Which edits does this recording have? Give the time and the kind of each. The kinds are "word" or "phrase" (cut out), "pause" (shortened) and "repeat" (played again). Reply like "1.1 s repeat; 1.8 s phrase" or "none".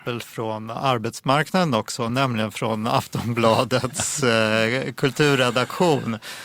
none